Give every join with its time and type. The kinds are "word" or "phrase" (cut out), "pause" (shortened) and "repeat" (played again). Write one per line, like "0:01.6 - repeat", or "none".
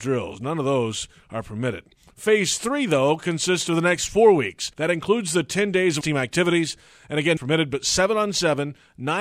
0:04.7 - pause
0:06.0 - word
0:07.4 - phrase